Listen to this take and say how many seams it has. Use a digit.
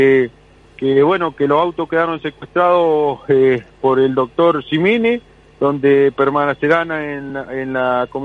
0